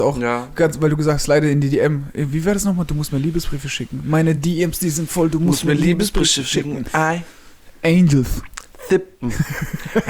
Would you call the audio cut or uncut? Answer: uncut